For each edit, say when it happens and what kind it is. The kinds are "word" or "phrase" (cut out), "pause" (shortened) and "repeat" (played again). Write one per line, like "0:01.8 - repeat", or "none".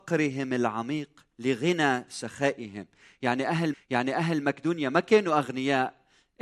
0:01.3 - pause
0:03.7 - repeat

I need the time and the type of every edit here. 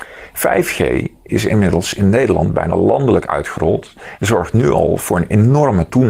none

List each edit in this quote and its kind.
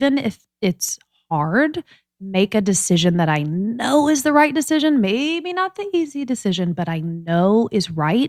none

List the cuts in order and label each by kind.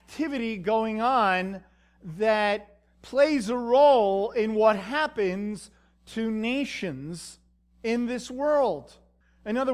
none

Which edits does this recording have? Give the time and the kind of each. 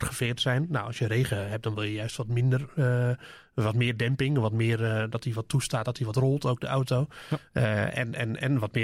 none

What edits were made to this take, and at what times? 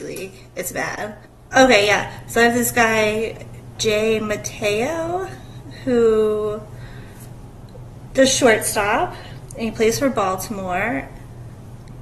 0:01.3 - pause
0:03.7 - word

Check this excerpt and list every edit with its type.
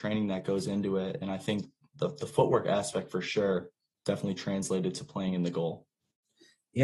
none

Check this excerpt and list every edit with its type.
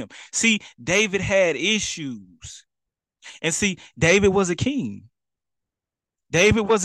none

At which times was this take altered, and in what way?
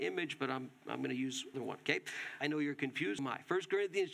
0:01.5 - word
0:02.4 - word
0:03.2 - word

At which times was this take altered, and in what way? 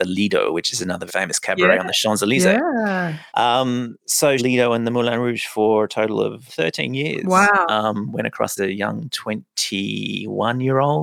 0:01.1 - word
0:03.3 - pause
0:04.4 - phrase
0:06.5 - word
0:08.6 - phrase

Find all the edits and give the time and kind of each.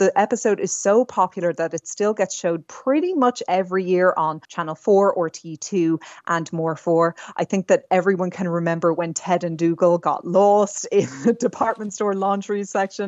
0:04.4 - pause

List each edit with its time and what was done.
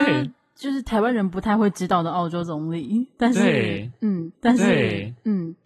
0:04.3 - repeat

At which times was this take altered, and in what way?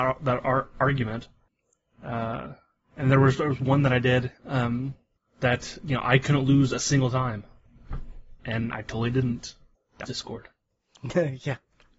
0:04.4 - pause
0:08.4 - pause
0:10.0 - word

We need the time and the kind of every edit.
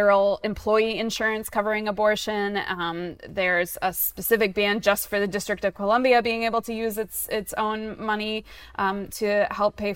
none

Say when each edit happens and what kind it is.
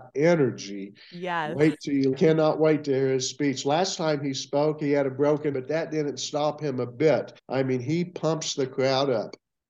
0:02.1 - word
0:05.5 - word
0:07.4 - pause

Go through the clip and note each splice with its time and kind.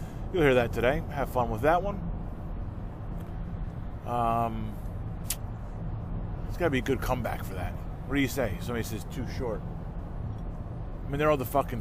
none

